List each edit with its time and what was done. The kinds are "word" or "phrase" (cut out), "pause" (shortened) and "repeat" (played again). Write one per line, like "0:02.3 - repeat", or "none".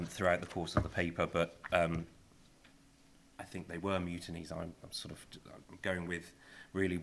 0:04.8 - pause
0:05.7 - pause